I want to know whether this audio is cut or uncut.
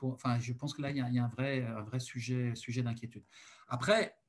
uncut